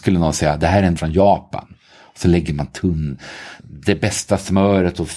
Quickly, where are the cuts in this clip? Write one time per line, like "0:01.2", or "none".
0:01.0
0:03.6